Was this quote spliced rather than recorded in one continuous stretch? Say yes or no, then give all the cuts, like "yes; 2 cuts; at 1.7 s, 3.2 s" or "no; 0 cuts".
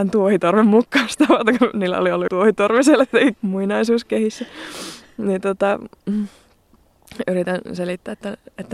yes; 2 cuts; at 2.3 s, 3.3 s